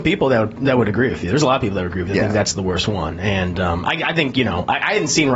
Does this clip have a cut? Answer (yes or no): no